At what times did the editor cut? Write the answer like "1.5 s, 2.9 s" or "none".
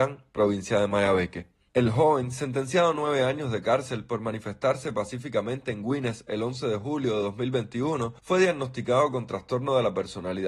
1.7 s, 8.2 s